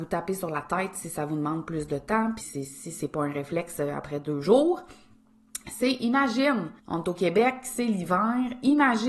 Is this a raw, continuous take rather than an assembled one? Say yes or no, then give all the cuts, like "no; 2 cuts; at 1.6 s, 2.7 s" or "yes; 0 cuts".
no; 2 cuts; at 2.4 s, 6.8 s